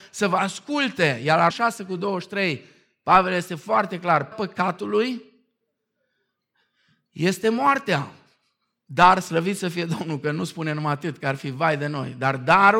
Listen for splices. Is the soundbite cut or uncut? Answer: cut